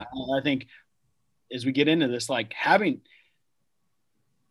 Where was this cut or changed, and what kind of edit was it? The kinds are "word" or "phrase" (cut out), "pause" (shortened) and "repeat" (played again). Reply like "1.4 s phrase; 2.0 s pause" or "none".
none